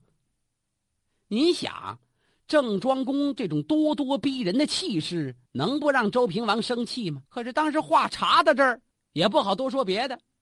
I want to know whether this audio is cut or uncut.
cut